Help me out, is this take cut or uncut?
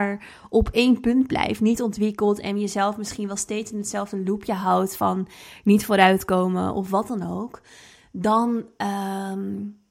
uncut